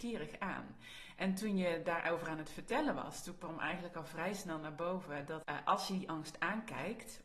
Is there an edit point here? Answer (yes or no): yes